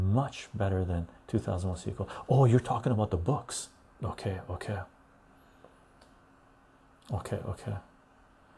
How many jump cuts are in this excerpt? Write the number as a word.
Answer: zero